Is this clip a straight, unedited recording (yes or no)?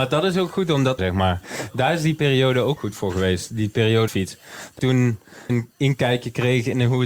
no